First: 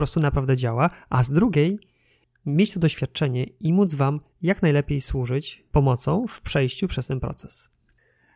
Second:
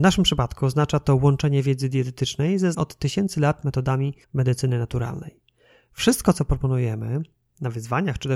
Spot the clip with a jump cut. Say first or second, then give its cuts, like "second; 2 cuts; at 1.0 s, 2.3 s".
second; 2 cuts; at 2.7 s, 4.2 s